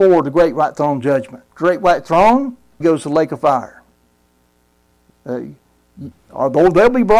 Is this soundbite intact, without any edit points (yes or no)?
no